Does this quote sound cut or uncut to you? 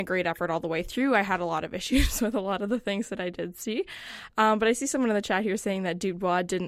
uncut